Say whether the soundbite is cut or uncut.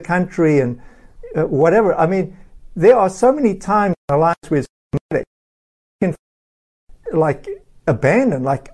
uncut